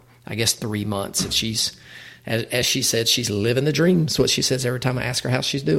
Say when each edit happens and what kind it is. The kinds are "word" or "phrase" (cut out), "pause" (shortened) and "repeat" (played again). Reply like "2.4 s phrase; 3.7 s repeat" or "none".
none